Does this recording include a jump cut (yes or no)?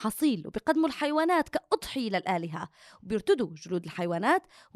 no